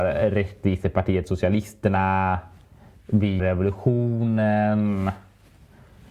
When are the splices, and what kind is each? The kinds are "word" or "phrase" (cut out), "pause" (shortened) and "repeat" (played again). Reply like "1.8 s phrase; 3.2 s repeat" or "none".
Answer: 3.4 s word